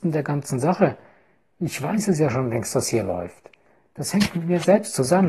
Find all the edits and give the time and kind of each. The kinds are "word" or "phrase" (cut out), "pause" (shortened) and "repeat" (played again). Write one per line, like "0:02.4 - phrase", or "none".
none